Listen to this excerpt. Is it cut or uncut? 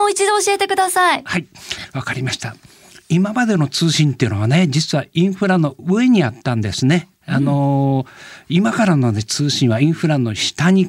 uncut